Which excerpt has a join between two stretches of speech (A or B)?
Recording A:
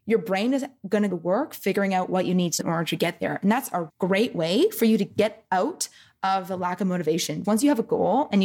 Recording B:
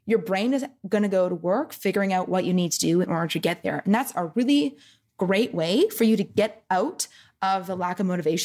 A